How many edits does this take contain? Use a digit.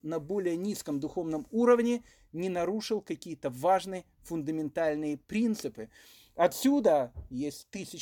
0